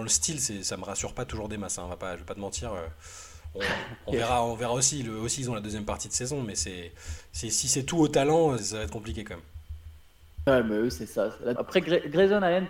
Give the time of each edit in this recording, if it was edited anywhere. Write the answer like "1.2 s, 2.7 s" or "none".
8.6 s, 11.6 s